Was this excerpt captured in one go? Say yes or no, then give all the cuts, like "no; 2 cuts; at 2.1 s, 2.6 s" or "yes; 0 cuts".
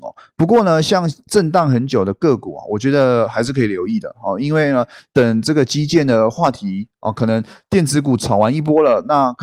yes; 0 cuts